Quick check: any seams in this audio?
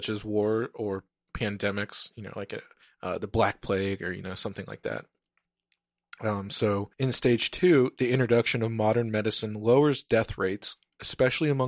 yes; 2 cuts; at 2.8 s, 6.9 s

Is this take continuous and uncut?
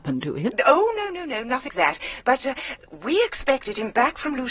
no; 1 cut; at 1.7 s

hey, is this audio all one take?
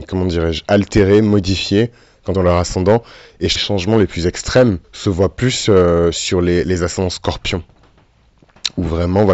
no; 3 cuts; at 2.3 s, 3.6 s, 4.8 s

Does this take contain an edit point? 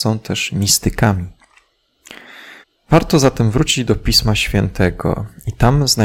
yes; 1 cut; at 2.6 s

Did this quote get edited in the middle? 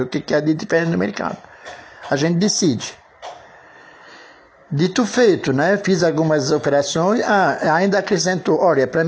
no; 0 cuts

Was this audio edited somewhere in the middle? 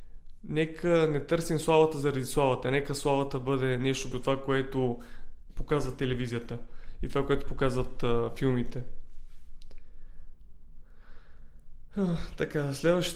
yes; 1 cut; at 4.1 s

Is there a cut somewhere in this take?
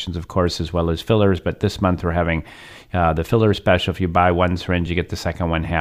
no; 0 cuts

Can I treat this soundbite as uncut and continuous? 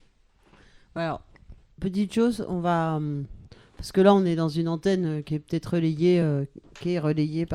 yes; 0 cuts

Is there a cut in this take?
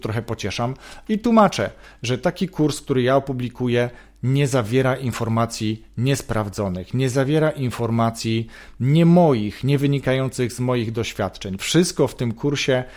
no; 0 cuts

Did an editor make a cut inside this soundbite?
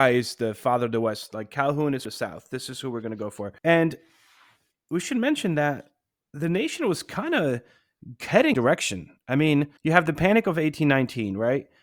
yes; 4 cuts; at 2.1 s, 3.6 s, 8.5 s, 9.8 s

